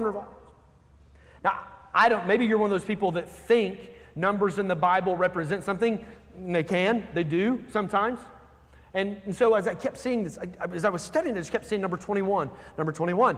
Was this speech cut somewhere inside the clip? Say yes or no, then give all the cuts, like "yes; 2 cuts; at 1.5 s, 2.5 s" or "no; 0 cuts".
no; 0 cuts